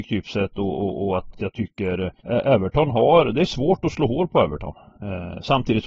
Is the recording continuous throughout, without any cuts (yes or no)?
no